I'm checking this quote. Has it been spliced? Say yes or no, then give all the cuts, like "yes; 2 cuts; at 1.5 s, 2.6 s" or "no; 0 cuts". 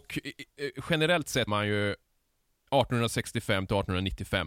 yes; 1 cut; at 1.5 s